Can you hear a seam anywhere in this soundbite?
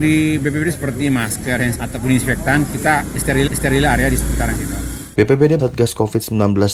yes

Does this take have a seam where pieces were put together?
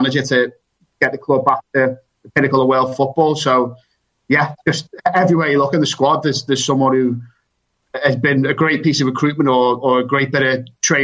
no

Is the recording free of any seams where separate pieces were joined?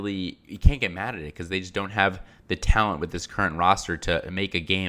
yes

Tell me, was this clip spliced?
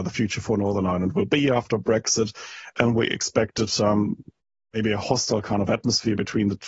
no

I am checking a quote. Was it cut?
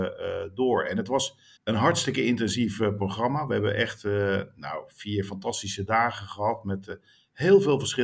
yes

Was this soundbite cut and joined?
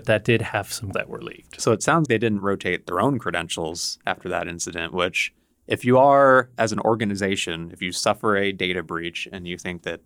yes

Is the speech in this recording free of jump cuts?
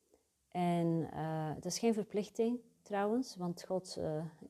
yes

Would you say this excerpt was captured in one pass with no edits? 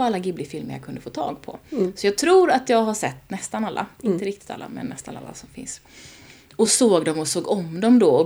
yes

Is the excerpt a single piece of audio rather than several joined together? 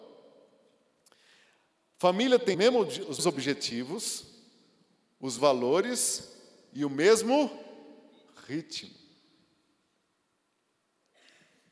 no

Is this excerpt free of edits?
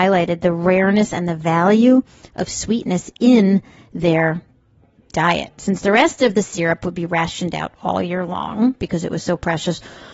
yes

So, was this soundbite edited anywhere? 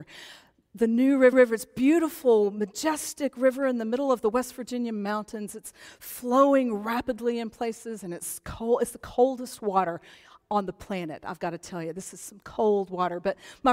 yes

